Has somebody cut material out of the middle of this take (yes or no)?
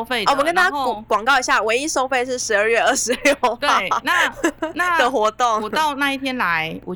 no